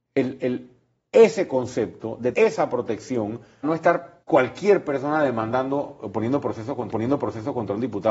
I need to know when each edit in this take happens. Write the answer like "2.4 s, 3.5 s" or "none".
2.3 s, 3.6 s, 4.2 s, 6.9 s